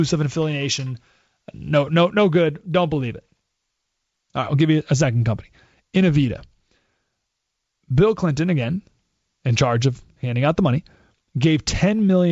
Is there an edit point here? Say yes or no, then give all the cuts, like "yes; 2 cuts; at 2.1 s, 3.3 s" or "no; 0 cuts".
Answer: no; 0 cuts